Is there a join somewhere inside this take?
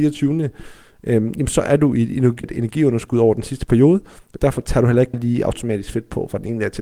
yes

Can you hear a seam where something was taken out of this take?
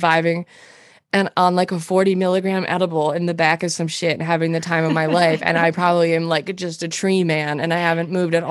no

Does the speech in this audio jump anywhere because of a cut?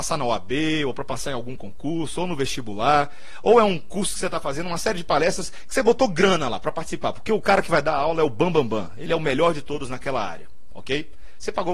no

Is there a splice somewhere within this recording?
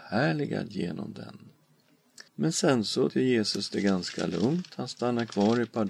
yes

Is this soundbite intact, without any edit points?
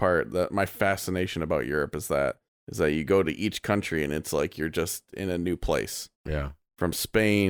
no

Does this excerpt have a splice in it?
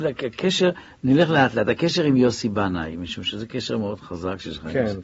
no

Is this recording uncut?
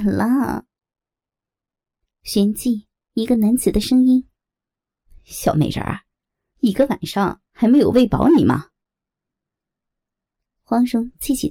yes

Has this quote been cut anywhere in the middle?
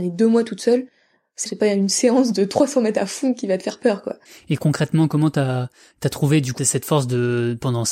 yes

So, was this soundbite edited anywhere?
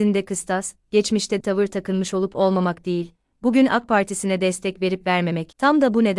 yes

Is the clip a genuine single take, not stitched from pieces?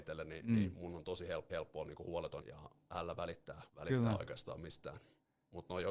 no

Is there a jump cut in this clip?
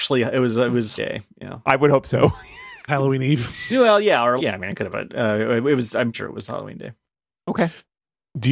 yes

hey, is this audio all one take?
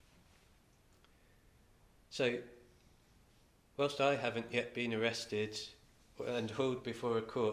yes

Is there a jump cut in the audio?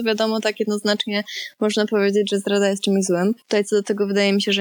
yes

